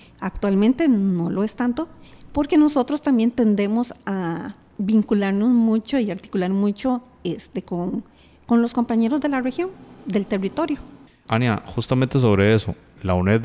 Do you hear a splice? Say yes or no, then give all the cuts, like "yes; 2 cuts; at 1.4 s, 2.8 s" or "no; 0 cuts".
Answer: no; 0 cuts